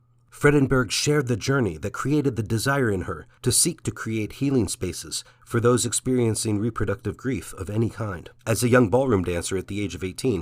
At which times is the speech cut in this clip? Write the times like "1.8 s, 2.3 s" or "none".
3.3 s, 8.4 s

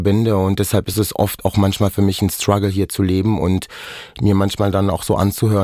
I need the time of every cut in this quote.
none

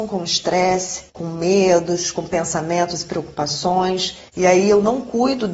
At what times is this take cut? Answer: 1.1 s, 4.3 s

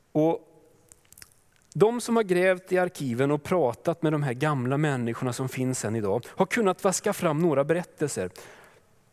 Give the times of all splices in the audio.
none

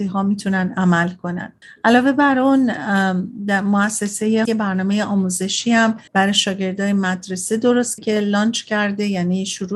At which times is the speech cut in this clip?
1.6 s, 4.5 s, 6.1 s, 8.0 s

